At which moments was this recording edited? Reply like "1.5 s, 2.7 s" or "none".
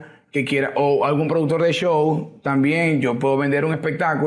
none